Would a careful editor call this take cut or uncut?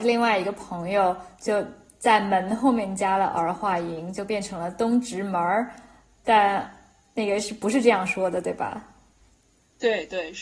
uncut